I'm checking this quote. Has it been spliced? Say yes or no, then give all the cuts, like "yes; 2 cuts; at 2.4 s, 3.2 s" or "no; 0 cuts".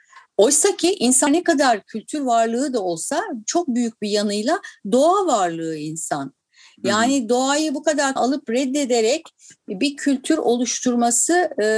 yes; 2 cuts; at 1.3 s, 8.2 s